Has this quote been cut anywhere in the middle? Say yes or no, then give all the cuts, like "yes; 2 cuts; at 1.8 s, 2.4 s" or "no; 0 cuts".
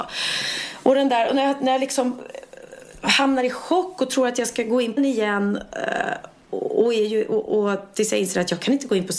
yes; 1 cut; at 5.0 s